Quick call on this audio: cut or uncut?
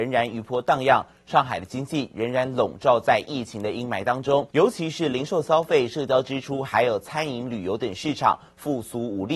cut